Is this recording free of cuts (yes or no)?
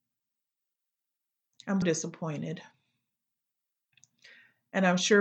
no